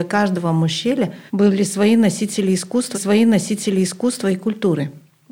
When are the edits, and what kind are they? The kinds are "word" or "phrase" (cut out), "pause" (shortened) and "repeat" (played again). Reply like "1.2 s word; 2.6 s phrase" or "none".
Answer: 1.3 s pause; 2.9 s repeat

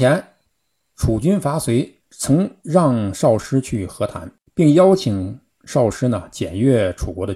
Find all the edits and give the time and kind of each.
2.0 s pause; 4.5 s pause

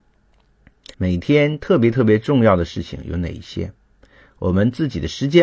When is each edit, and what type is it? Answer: 0.9 s pause

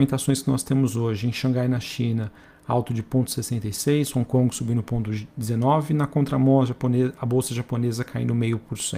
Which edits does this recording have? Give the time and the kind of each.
none

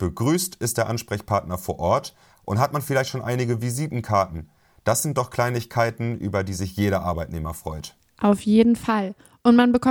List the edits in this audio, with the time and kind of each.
none

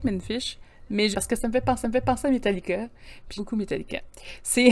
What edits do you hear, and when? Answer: 1.1 s phrase; 1.8 s repeat; 3.4 s word

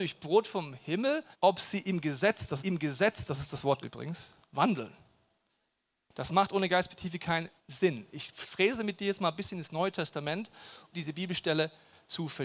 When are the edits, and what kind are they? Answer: 1.3 s pause; 2.6 s repeat; 3.8 s word; 4.4 s pause; 7.6 s pause; 10.9 s word

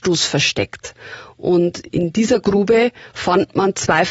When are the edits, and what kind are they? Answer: 1.9 s word

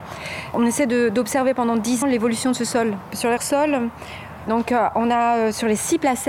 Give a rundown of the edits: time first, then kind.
2.0 s word; 3.4 s word; 4.5 s word

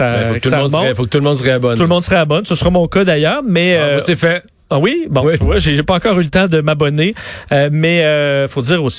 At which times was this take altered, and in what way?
none

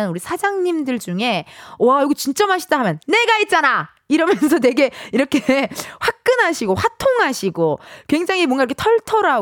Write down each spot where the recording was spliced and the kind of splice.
none

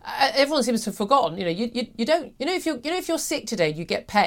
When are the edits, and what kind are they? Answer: 2.4 s pause

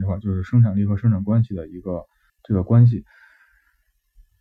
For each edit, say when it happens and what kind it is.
2.3 s pause

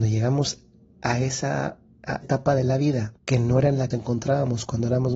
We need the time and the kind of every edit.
2.2 s word; 3.2 s pause; 3.9 s phrase

